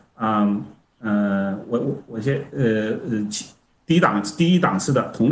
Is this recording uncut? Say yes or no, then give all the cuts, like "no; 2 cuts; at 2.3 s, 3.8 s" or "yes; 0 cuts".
yes; 0 cuts